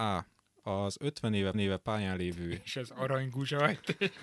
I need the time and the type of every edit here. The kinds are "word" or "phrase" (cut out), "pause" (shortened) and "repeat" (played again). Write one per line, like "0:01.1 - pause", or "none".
0:01.5 - repeat